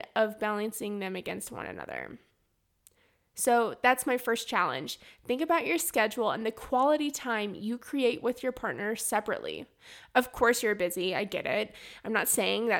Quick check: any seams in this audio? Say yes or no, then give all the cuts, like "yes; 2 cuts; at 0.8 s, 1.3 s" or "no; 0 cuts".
no; 0 cuts